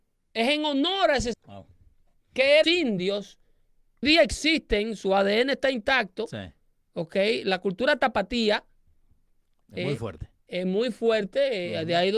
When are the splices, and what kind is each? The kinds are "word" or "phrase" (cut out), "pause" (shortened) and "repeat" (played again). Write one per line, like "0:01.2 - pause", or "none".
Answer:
0:01.3 - word
0:02.6 - phrase
0:04.0 - word

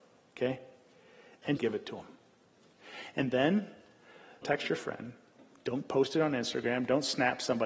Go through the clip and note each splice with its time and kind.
0:01.6 - word
0:04.4 - word

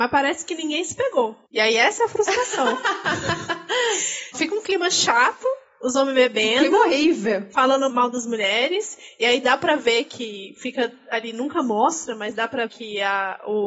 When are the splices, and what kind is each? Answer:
0:01.4 - pause
0:04.3 - word
0:07.9 - word
0:12.7 - word

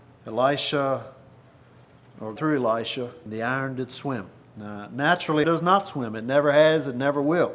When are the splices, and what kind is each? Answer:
0:02.4 - word
0:03.3 - phrase
0:04.4 - pause
0:05.4 - word

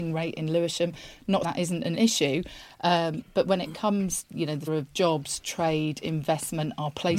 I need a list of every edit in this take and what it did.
0:01.4 - word
0:01.9 - word
0:04.2 - word
0:04.7 - word

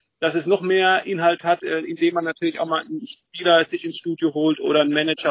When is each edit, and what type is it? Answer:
none

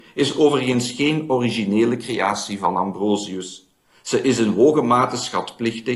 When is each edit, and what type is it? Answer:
none

